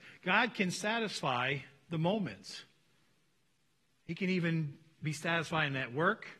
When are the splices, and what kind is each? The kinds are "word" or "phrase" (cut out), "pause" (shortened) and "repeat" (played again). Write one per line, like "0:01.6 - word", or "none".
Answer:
none